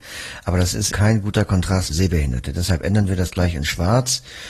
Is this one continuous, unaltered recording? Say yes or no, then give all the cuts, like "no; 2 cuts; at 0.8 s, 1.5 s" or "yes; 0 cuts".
no; 2 cuts; at 0.9 s, 1.9 s